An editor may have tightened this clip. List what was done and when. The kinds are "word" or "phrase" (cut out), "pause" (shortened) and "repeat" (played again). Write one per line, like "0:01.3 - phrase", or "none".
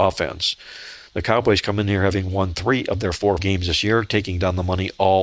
0:03.4 - word